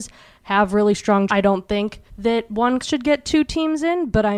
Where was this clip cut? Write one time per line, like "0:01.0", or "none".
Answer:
0:01.3
0:02.1
0:02.8